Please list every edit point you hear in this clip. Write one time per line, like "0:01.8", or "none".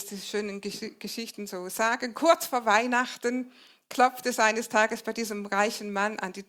none